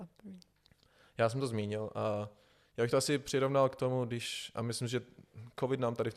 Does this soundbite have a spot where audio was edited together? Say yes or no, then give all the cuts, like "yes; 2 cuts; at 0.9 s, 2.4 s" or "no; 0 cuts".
no; 0 cuts